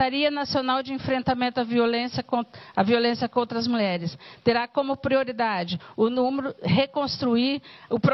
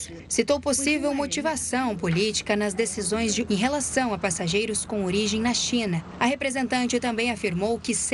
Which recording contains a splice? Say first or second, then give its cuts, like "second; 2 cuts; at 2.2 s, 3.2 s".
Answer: second; 1 cut; at 3.5 s